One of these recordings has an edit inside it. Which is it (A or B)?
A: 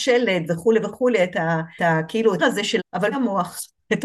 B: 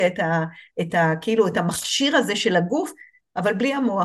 A